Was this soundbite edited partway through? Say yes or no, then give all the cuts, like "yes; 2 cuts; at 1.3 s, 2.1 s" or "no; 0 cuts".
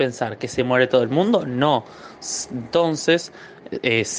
no; 0 cuts